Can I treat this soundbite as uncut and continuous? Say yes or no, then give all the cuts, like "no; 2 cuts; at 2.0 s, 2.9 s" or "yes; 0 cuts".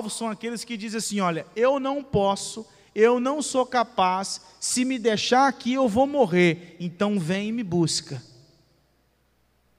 yes; 0 cuts